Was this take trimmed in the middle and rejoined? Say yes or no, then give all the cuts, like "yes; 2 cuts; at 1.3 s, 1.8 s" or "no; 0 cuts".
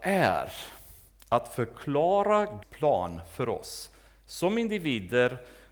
yes; 1 cut; at 2.6 s